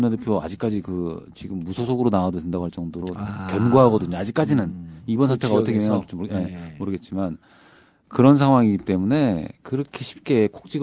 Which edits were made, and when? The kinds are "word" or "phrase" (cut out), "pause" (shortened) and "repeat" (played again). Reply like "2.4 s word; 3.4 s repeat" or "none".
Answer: none